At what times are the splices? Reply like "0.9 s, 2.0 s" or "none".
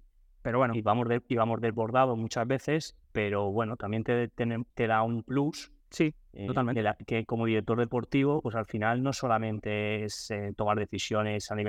3.0 s, 4.7 s, 5.8 s